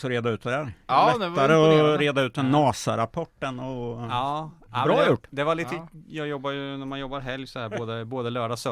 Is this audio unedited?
yes; 0 cuts

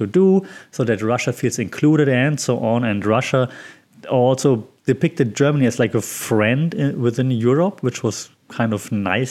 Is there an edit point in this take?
yes; 1 cut; at 4.8 s

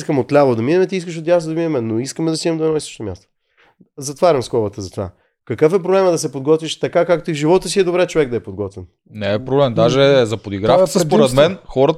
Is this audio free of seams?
yes; 0 cuts

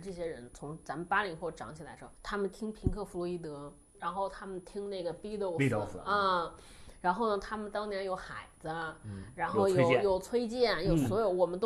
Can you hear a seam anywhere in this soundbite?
yes; 1 cut; at 2.1 s

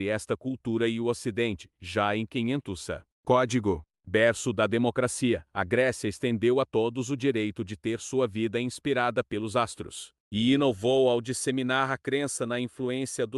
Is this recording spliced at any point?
no; 0 cuts

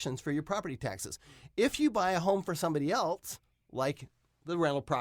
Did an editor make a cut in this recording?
no; 0 cuts

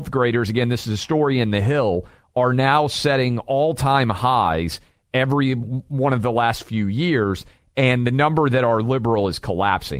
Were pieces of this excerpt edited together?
no; 0 cuts

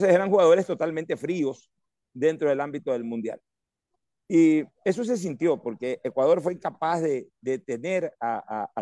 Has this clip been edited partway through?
no; 0 cuts

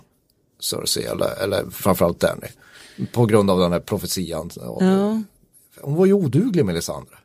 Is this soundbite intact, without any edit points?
yes; 0 cuts

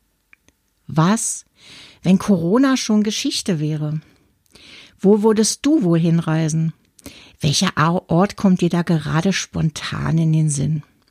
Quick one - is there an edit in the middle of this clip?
no; 0 cuts

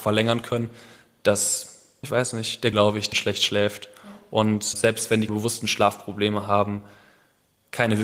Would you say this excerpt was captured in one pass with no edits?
no; 5 cuts; at 2.0 s, 2.7 s, 3.1 s, 4.7 s, 5.3 s

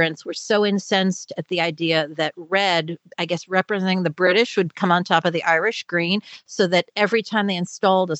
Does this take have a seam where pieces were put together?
no; 0 cuts

